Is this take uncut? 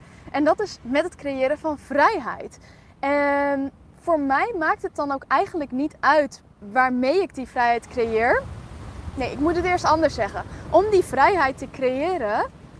yes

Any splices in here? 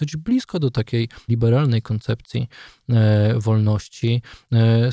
yes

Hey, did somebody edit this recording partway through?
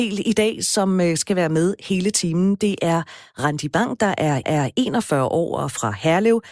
yes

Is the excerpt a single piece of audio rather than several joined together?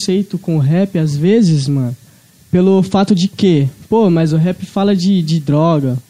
yes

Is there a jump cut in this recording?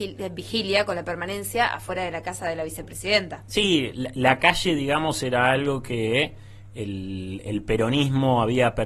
no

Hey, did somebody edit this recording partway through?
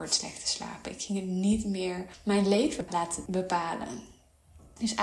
no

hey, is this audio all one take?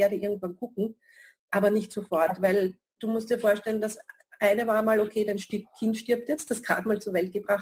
yes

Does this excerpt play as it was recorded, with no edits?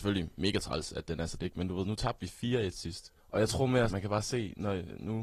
no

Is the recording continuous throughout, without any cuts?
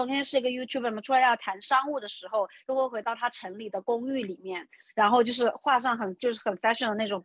no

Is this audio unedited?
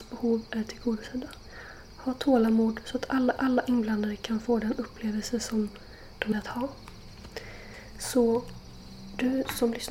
no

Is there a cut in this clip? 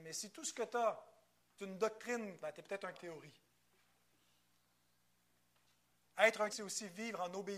yes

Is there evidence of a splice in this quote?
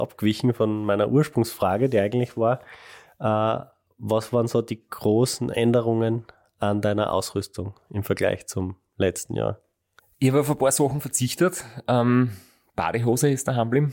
no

